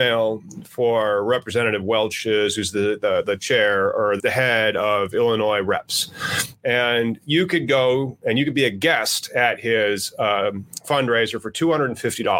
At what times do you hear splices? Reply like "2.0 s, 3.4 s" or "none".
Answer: 4.2 s